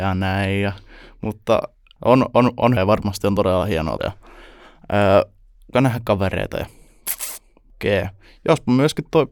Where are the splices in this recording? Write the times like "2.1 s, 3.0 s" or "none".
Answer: 2.0 s, 2.8 s, 4.0 s, 5.7 s, 7.7 s